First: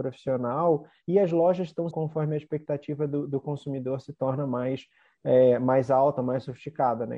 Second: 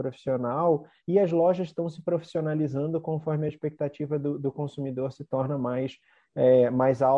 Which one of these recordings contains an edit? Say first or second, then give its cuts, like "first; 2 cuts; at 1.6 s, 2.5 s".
first; 1 cut; at 1.9 s